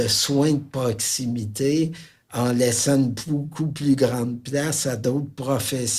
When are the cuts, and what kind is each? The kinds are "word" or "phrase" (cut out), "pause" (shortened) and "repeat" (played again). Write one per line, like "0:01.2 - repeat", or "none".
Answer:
none